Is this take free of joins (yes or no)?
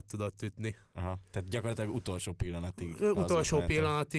yes